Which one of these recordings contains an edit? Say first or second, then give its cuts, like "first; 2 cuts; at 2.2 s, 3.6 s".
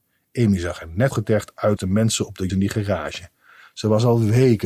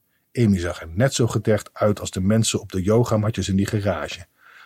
first; 3 cuts; at 1.1 s, 1.8 s, 2.5 s